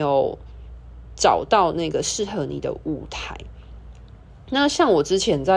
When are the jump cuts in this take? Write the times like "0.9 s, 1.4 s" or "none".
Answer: none